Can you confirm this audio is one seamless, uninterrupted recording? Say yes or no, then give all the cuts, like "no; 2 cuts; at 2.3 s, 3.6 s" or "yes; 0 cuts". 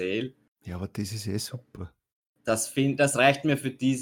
yes; 0 cuts